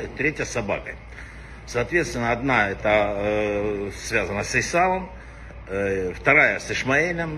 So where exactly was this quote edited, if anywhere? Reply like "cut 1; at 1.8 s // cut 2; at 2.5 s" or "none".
none